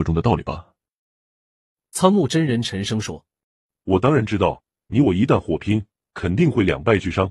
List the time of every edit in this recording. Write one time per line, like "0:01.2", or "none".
0:03.4

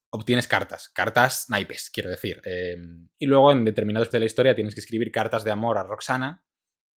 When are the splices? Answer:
0:04.1

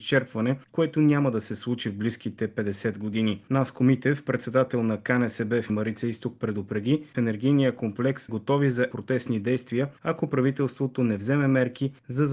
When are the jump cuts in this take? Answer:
0:05.7
0:07.1
0:08.3
0:08.9

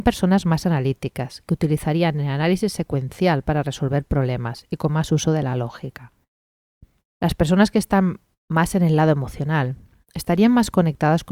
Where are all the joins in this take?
none

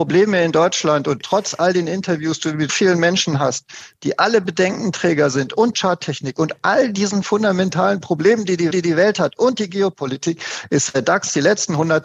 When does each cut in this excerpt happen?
0:02.7
0:05.7
0:08.7

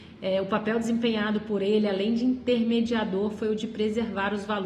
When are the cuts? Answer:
none

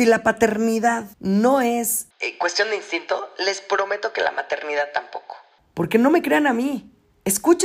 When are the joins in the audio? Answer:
none

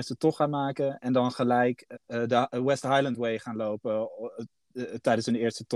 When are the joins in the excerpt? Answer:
0:01.9

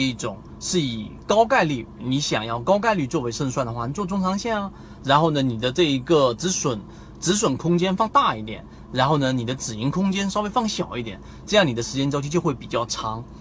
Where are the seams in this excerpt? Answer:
none

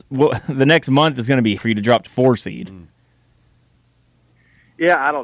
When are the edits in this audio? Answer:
0:01.6
0:02.1

